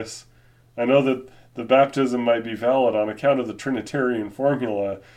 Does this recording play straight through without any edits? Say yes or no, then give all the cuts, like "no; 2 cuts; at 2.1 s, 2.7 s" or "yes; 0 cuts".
yes; 0 cuts